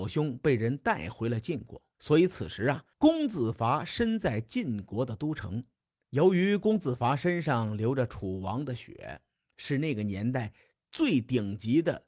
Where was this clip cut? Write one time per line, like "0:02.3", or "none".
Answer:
0:01.9
0:02.9
0:05.7